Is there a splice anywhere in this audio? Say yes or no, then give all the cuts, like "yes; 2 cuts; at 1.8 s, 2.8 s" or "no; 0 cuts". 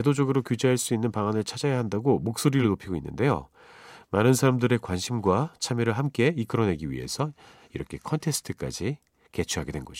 no; 0 cuts